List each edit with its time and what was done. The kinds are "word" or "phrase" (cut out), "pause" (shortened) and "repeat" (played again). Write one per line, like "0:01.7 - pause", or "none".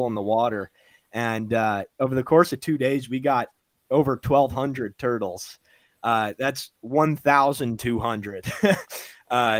none